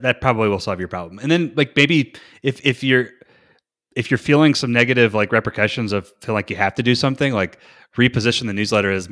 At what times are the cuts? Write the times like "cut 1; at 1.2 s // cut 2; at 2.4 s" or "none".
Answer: none